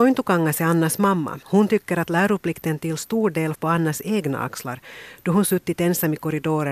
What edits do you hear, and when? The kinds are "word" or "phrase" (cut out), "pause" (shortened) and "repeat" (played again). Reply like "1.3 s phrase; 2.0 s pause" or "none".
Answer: 1.4 s pause; 3.5 s word